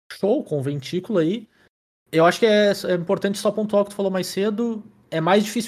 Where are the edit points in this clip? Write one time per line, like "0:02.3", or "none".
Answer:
none